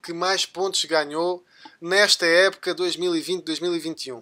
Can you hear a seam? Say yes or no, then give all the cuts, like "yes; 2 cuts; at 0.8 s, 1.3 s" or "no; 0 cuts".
no; 0 cuts